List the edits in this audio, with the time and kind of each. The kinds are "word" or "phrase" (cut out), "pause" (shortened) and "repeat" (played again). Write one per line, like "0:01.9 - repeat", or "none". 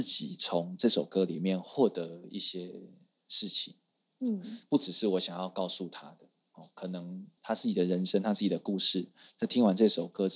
0:07.4 - pause